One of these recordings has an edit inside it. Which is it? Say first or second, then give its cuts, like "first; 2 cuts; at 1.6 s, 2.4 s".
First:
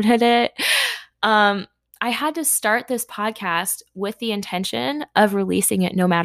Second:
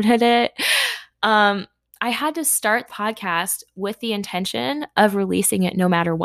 second; 1 cut; at 2.9 s